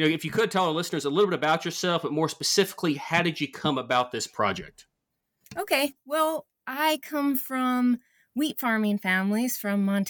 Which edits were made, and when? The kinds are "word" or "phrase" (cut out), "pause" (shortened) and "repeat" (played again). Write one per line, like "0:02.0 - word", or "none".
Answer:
none